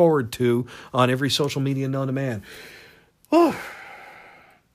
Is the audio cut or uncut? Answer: uncut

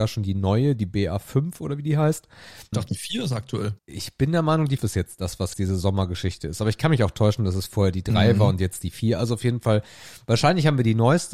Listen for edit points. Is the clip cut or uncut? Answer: cut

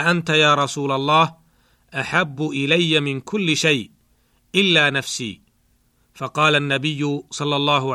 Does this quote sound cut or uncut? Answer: uncut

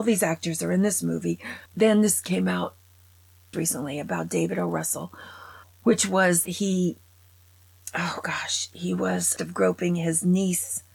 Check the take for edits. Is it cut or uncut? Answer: cut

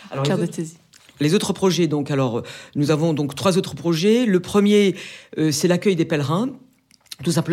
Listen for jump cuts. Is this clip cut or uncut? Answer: uncut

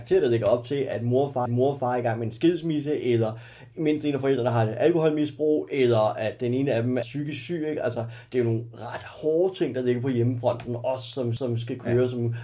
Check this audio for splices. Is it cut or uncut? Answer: cut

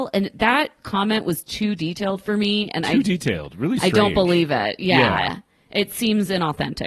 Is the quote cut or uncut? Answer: uncut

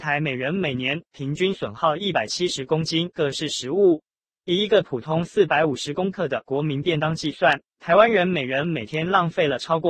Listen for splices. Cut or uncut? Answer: cut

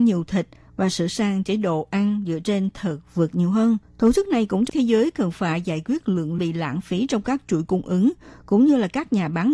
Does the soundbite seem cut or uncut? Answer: cut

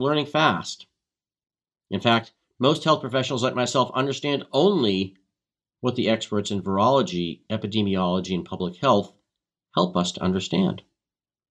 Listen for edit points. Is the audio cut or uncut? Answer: uncut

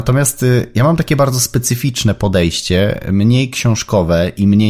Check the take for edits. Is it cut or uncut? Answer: uncut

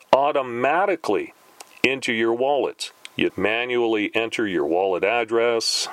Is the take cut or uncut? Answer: cut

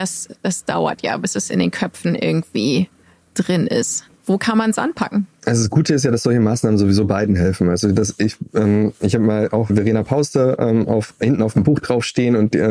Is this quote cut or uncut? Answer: cut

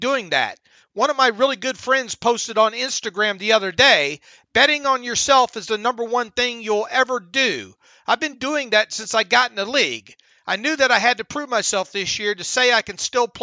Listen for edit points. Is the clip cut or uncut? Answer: uncut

